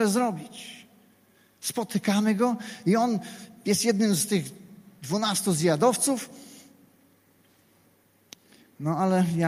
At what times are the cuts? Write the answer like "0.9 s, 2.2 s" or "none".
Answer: none